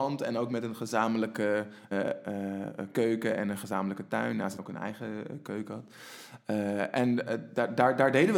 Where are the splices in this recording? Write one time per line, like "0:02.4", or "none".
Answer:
0:01.9
0:04.6